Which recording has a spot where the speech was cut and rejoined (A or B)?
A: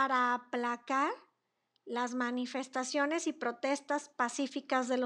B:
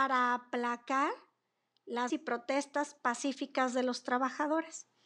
B